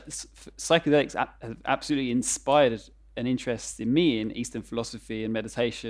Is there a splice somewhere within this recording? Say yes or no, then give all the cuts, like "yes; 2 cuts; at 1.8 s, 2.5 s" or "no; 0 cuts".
no; 0 cuts